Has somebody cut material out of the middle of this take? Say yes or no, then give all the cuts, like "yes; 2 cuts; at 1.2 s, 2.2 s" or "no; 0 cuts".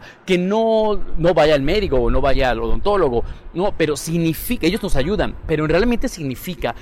no; 0 cuts